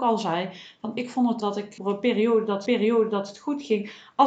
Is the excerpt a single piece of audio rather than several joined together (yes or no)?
no